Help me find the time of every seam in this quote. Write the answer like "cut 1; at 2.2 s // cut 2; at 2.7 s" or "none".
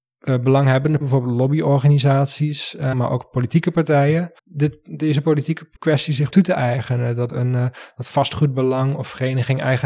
cut 1; at 1.0 s // cut 2; at 2.9 s // cut 3; at 4.4 s // cut 4; at 5.8 s // cut 5; at 6.3 s // cut 6; at 7.3 s